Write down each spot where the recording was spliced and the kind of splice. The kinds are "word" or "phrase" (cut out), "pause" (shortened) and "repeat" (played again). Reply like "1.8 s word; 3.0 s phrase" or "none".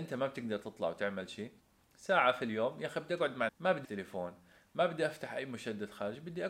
1.6 s pause; 3.5 s word; 3.8 s word

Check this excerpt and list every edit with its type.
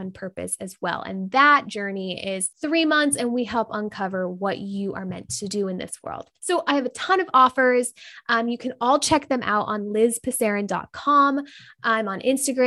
2.5 s pause

